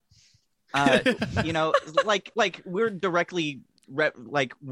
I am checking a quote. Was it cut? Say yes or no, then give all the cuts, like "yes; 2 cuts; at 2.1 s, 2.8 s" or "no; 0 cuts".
no; 0 cuts